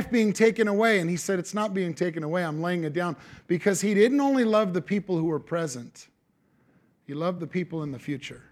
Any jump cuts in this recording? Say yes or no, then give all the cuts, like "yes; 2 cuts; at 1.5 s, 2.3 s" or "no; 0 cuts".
no; 0 cuts